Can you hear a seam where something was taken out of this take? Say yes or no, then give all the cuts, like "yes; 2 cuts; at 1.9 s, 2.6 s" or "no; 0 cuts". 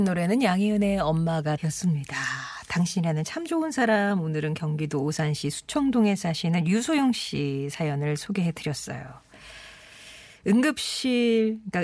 yes; 1 cut; at 1.6 s